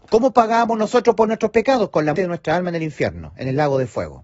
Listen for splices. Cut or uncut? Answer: cut